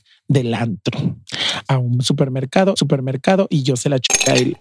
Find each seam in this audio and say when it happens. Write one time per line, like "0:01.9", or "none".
0:01.7
0:02.8